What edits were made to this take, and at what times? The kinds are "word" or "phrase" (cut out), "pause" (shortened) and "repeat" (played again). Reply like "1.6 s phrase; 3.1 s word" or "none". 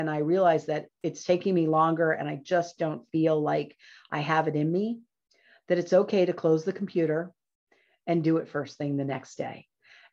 none